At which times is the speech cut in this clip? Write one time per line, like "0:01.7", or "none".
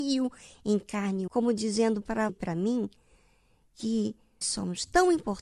0:01.3
0:02.3
0:04.4